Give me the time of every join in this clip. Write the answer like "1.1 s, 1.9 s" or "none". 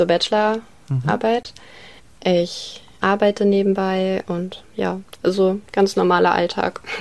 none